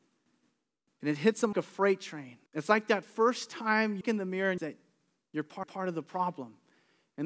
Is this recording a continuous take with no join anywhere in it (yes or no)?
no